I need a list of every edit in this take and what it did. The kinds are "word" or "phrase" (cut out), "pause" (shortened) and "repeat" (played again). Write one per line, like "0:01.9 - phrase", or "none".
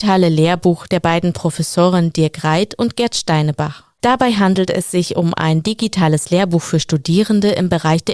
none